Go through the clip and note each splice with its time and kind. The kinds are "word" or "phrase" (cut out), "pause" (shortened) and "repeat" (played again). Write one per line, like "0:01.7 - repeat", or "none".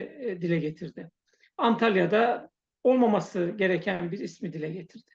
none